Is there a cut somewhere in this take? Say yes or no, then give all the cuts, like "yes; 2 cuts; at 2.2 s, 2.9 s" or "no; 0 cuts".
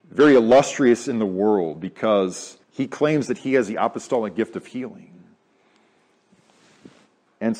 yes; 1 cut; at 2.6 s